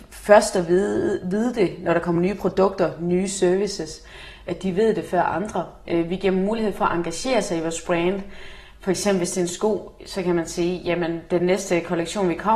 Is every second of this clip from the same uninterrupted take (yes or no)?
yes